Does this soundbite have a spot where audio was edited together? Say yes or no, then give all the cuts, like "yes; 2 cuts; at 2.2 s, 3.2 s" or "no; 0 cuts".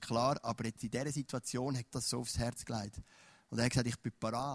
yes; 1 cut; at 1.9 s